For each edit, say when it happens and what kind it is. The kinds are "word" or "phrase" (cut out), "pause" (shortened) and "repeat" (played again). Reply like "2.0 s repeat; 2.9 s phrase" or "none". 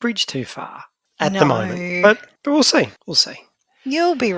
2.4 s pause; 3.0 s pause